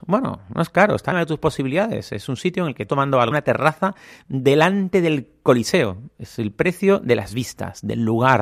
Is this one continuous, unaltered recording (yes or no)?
no